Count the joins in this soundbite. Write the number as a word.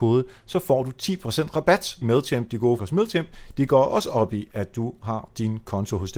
two